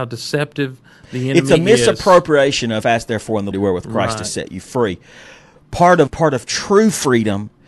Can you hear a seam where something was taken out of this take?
yes; 3 cuts; at 2.8 s, 3.5 s, 6.1 s

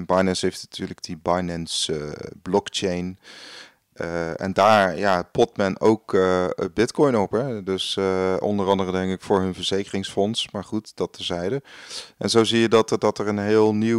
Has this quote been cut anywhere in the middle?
no; 0 cuts

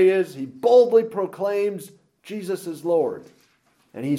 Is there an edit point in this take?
no; 0 cuts

